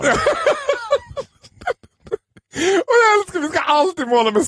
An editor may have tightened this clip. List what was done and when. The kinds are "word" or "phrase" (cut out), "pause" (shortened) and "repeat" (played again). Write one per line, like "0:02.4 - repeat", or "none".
none